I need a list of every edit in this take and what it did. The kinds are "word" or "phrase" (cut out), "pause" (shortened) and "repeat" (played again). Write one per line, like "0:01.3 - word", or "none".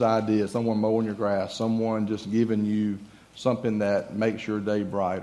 none